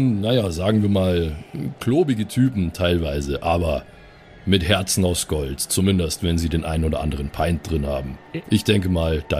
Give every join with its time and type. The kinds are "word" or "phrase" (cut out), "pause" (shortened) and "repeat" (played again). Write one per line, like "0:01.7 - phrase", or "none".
none

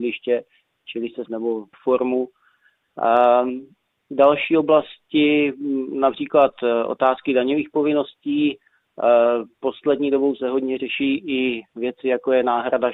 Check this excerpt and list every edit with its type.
0:01.3 - phrase
0:01.7 - phrase

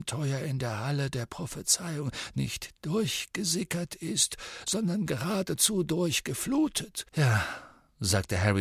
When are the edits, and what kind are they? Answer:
0:07.1 - pause

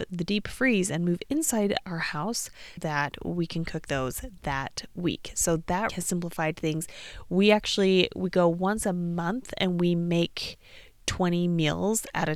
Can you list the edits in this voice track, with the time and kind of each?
0:02.8 - word
0:05.9 - word

